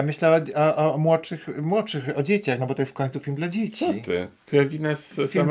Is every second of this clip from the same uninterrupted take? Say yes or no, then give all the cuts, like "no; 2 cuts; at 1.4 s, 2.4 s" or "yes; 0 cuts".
yes; 0 cuts